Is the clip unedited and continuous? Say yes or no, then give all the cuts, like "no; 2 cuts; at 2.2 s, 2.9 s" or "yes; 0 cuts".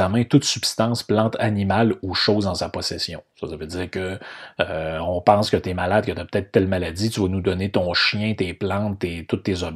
yes; 0 cuts